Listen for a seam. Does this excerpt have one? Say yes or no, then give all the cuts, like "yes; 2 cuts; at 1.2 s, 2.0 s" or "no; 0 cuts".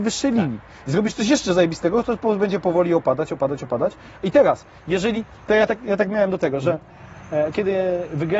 no; 0 cuts